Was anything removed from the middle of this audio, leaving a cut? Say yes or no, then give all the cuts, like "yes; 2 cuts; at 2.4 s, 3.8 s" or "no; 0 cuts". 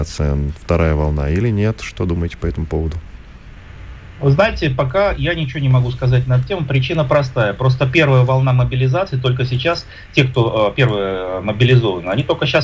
no; 0 cuts